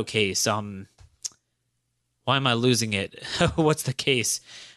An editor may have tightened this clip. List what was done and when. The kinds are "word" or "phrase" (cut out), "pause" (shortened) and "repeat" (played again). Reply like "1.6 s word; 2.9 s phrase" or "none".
none

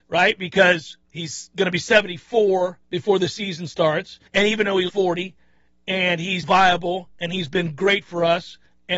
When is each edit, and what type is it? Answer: 2.8 s pause; 4.3 s pause; 4.9 s word; 6.4 s word

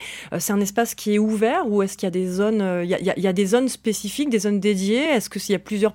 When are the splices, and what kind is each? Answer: none

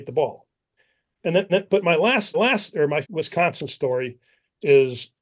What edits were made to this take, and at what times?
1.5 s repeat; 2.3 s repeat; 3.0 s word

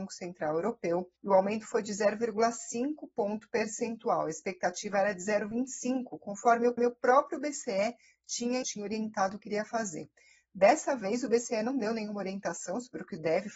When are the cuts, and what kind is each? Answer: 1.2 s pause; 6.8 s repeat; 8.6 s word

